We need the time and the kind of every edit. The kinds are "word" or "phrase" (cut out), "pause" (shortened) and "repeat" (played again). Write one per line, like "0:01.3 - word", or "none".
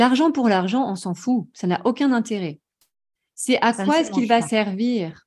none